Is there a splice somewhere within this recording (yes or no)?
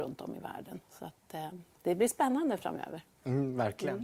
no